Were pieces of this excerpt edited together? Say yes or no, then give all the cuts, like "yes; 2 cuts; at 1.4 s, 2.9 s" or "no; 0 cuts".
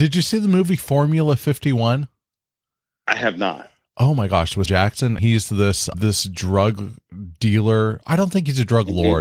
yes; 3 cuts; at 4.7 s, 5.2 s, 5.9 s